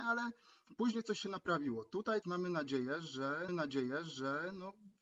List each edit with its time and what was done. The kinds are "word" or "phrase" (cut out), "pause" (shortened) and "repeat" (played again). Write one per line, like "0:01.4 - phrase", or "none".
0:02.2 - word
0:03.5 - repeat